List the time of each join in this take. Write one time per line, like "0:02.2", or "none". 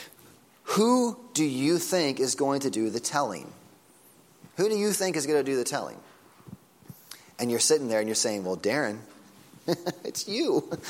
none